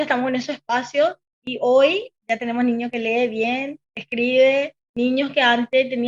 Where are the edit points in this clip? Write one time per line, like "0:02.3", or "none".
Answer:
0:03.8
0:04.8